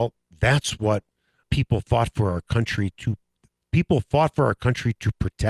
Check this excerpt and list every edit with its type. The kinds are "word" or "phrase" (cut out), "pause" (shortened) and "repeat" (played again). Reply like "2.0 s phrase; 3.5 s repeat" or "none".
1.4 s word